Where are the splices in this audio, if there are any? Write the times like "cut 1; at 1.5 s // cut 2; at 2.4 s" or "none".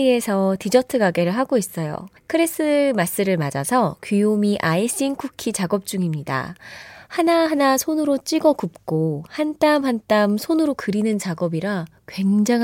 cut 1; at 2.2 s